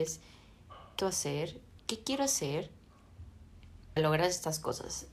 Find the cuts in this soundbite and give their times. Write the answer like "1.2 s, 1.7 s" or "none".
1.0 s, 1.8 s, 4.0 s

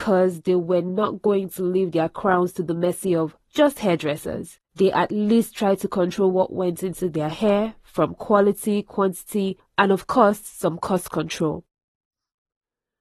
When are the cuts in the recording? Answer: 3.4 s, 4.6 s

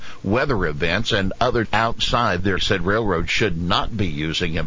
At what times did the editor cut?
1.6 s, 2.6 s

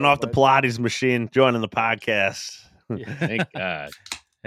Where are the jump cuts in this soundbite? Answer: none

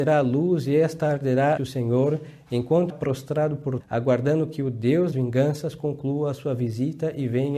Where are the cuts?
1.6 s, 2.9 s, 3.8 s, 5.1 s

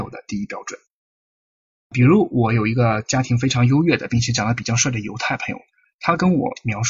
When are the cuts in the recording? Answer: none

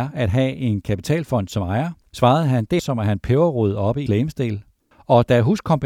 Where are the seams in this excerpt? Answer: 2.8 s, 4.1 s, 4.9 s

